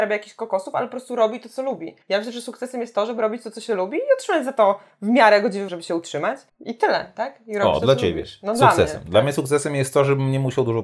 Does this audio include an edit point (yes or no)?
yes